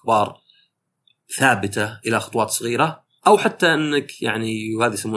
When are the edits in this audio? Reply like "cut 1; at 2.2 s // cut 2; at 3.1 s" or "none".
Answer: cut 1; at 3.2 s